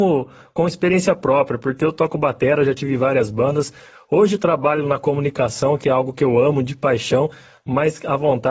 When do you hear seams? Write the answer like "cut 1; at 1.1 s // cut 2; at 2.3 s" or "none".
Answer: none